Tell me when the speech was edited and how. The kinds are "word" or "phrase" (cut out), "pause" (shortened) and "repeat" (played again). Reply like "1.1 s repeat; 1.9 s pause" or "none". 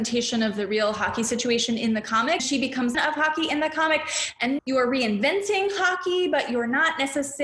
2.4 s word; 2.9 s phrase; 4.6 s word